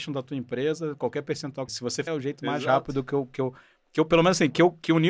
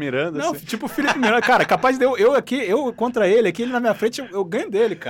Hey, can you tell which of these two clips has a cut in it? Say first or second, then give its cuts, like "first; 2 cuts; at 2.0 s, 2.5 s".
first; 2 cuts; at 1.7 s, 2.1 s